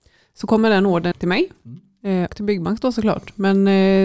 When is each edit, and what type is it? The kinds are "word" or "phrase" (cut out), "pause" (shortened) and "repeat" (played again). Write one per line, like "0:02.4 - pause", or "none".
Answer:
0:01.1 - word
0:02.3 - word